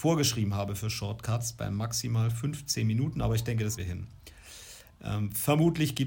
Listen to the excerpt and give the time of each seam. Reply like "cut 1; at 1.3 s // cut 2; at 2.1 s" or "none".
cut 1; at 3.8 s